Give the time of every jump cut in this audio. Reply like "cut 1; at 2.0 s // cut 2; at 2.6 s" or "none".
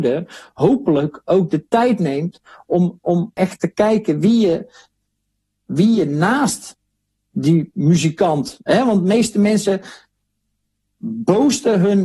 none